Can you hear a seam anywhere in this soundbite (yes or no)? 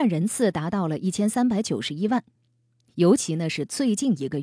no